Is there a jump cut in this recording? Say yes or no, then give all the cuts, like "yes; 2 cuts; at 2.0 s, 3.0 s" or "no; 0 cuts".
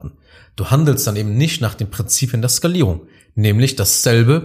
no; 0 cuts